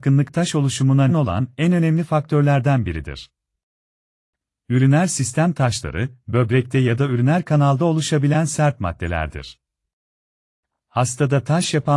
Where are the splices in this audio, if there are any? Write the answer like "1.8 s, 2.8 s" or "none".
1.1 s